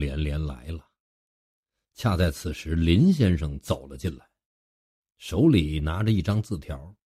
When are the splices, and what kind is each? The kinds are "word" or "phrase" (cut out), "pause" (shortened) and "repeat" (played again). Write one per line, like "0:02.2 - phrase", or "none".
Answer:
none